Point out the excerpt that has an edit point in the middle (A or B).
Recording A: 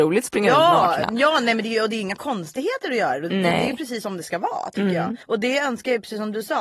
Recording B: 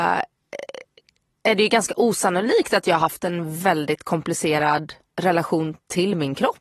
A